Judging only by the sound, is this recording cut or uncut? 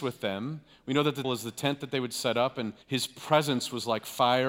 cut